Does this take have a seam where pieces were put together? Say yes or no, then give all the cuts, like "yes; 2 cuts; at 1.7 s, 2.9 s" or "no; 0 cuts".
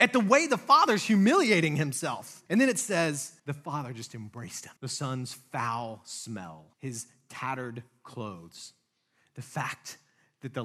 yes; 4 cuts; at 2.5 s, 3.4 s, 4.8 s, 6.7 s